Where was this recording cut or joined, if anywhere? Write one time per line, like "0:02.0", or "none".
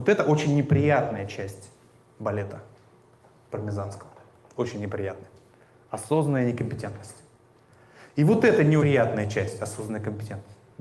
0:08.8